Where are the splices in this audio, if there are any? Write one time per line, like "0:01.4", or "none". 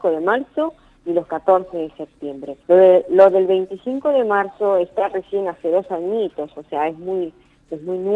0:02.6